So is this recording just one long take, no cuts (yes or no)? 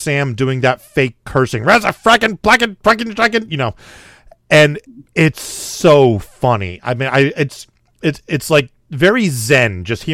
yes